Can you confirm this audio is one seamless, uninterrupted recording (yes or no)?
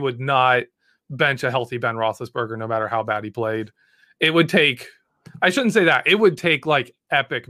yes